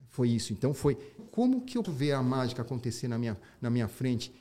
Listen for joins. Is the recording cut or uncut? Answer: cut